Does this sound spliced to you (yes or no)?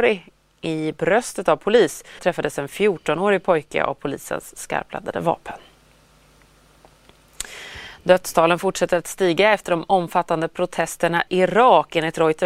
yes